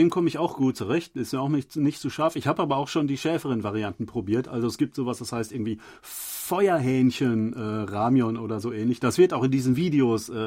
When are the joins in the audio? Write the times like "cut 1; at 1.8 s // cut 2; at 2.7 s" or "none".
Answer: none